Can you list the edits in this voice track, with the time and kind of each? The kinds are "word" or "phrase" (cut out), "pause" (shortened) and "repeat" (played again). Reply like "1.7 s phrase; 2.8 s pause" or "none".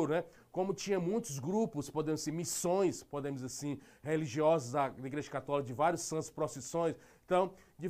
none